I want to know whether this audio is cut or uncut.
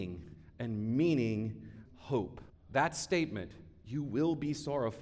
cut